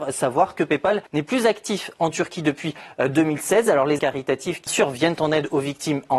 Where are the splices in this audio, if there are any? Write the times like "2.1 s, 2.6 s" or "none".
1.1 s, 4.0 s, 4.7 s